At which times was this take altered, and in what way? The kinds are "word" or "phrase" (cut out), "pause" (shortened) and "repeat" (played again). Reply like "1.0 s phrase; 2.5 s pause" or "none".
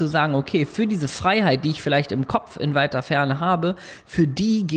none